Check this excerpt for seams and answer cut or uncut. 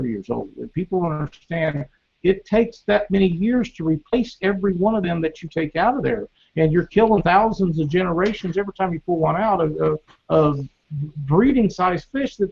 uncut